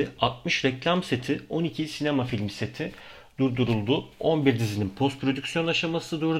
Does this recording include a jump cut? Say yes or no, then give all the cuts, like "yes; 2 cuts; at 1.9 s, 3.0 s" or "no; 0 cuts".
no; 0 cuts